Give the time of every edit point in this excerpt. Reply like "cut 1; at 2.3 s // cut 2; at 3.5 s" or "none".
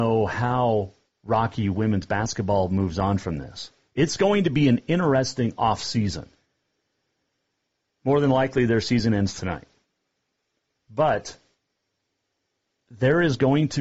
none